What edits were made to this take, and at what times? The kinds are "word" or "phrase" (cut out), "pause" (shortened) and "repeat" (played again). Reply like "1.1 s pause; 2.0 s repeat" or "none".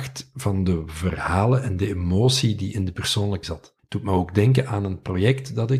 3.4 s word; 3.8 s pause